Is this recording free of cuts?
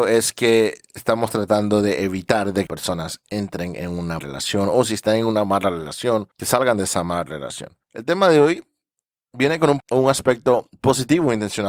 no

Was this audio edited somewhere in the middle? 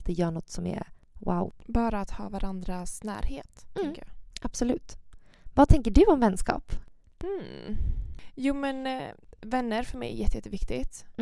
no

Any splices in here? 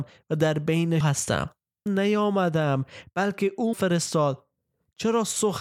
yes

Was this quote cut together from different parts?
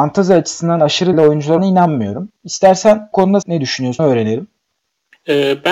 yes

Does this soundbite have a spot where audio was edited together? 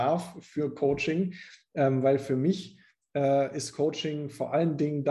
no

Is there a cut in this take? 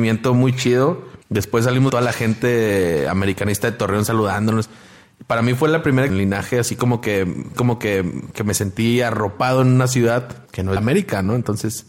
yes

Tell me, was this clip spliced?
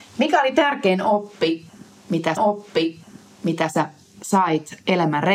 yes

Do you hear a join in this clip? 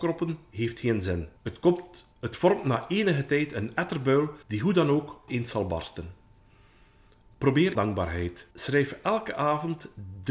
yes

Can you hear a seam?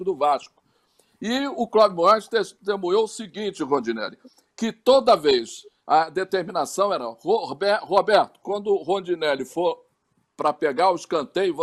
no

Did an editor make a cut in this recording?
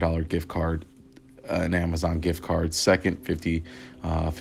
no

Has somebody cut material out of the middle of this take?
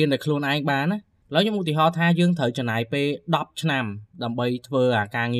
no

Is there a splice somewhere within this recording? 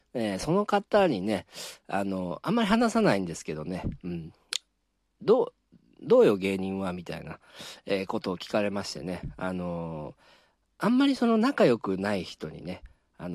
no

